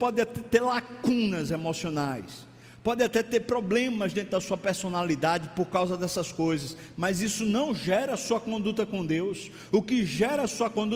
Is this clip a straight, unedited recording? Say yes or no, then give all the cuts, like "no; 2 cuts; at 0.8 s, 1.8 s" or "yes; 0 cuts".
yes; 0 cuts